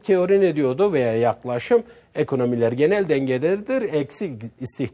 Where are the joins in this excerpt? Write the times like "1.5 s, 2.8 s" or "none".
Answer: none